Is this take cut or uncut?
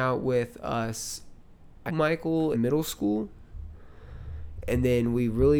cut